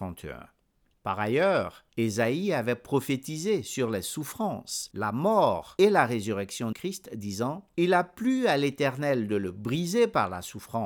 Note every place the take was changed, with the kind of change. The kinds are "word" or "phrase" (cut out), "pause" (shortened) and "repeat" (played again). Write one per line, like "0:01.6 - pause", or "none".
0:06.7 - word